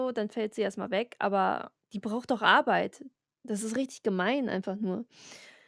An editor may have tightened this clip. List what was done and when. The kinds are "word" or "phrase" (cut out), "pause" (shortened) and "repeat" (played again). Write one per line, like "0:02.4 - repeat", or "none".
0:01.8 - pause
0:03.3 - pause